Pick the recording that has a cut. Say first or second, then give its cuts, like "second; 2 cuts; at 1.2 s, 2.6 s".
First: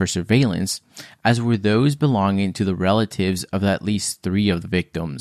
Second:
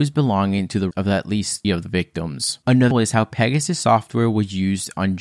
second; 3 cuts; at 0.9 s, 1.6 s, 2.9 s